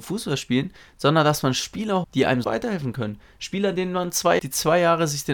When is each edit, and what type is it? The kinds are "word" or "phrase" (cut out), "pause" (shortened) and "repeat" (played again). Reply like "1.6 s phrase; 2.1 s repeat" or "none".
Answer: 2.0 s word; 2.4 s word; 4.4 s phrase

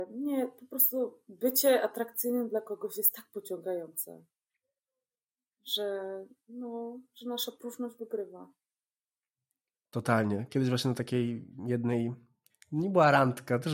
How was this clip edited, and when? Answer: none

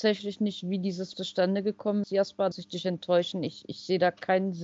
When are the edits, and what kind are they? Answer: 1.1 s word; 2.0 s word; 2.5 s word

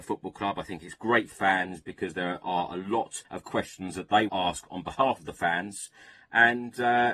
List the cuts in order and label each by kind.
1.3 s word; 3.2 s pause; 4.3 s word

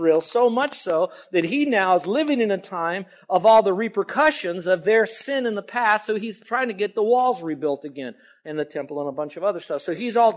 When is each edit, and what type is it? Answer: none

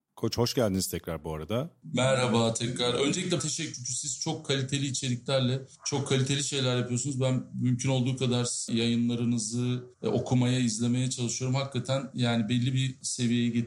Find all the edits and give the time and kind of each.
3.4 s word; 3.7 s word; 9.9 s pause

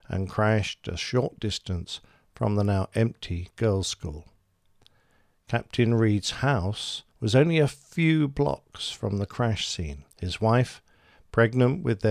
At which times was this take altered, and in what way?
7.1 s pause; 10.1 s pause

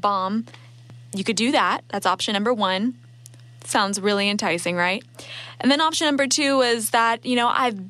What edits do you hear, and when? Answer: none

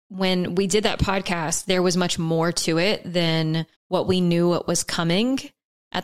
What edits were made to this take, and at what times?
3.7 s pause

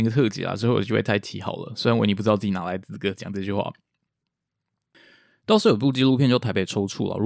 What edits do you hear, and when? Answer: none

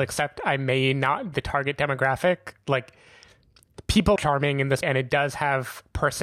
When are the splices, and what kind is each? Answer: 1.3 s word; 4.2 s word; 4.8 s word

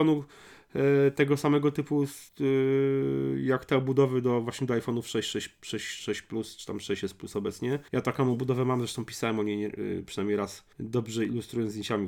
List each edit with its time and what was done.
2.3 s pause; 7.9 s pause; 10.7 s pause

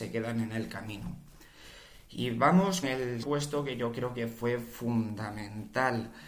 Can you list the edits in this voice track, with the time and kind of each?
2.8 s word; 3.2 s word

